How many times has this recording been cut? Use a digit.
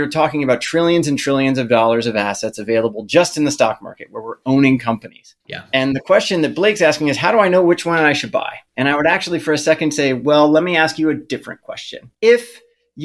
3